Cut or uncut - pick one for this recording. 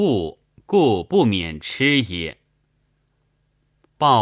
uncut